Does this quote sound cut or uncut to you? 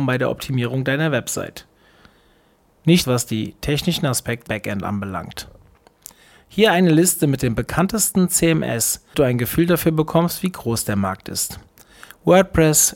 cut